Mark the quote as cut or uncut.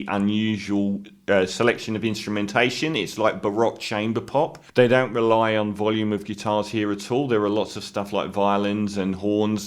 cut